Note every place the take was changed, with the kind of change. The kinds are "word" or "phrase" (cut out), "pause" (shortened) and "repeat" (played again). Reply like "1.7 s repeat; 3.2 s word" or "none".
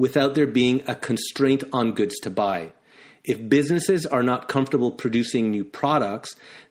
none